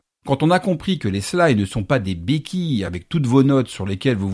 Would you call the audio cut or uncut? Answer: uncut